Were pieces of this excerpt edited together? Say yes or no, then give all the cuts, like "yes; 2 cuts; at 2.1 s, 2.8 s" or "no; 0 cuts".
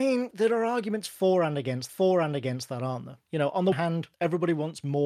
yes; 2 cuts; at 1.9 s, 3.7 s